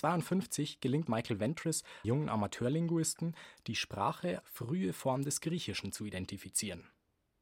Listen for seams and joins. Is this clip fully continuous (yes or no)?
no